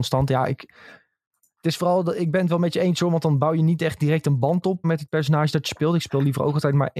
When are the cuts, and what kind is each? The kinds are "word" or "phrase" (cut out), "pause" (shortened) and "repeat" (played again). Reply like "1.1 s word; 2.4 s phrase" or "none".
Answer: 4.8 s word